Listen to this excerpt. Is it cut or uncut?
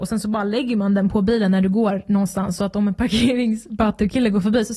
uncut